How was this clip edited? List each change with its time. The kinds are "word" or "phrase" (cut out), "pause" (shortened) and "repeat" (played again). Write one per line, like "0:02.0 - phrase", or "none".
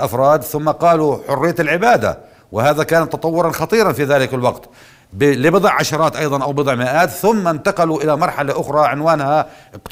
none